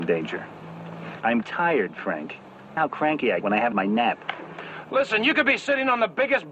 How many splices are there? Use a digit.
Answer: 4